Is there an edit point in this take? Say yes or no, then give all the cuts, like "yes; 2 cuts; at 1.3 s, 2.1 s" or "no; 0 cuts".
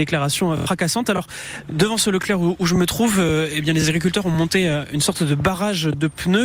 no; 0 cuts